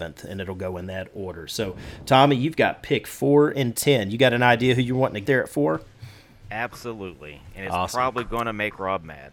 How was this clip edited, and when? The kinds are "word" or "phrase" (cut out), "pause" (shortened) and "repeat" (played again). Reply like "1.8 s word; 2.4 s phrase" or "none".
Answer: 5.3 s word